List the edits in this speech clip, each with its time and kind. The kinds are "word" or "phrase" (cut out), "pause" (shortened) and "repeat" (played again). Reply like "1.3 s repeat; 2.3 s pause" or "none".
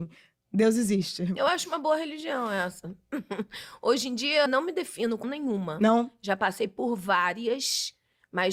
4.5 s word; 5.2 s word